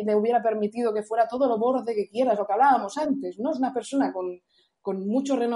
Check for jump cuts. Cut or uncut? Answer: uncut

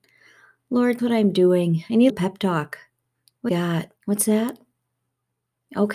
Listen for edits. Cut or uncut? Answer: cut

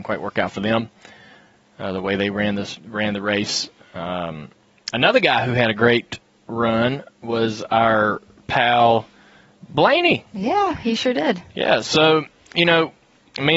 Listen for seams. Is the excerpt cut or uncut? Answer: uncut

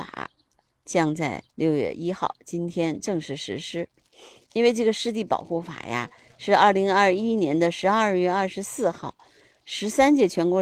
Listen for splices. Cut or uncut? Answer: cut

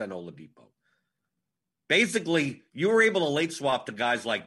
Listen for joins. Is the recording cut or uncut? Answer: uncut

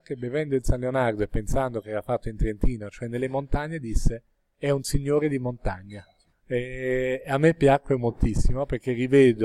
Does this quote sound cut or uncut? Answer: uncut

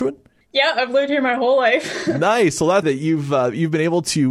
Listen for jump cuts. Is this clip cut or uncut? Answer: cut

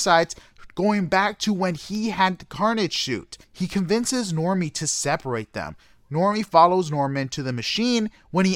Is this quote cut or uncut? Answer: uncut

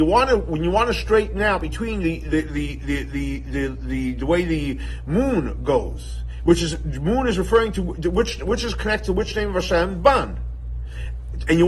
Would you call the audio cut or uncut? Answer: uncut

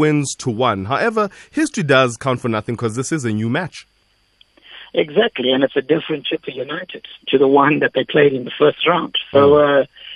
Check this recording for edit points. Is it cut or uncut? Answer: uncut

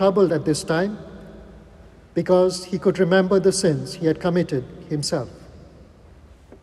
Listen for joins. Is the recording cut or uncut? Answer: uncut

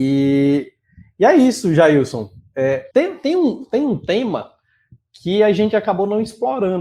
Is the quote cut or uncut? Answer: cut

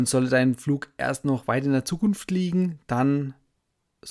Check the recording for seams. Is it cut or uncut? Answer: uncut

